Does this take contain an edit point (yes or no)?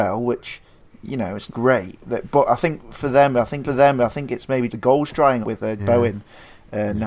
yes